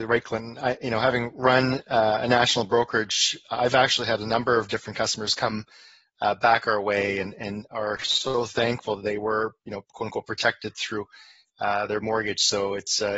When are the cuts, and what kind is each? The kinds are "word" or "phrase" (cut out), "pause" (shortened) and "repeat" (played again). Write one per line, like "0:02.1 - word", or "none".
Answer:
none